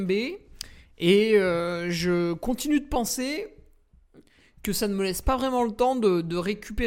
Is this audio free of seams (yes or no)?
yes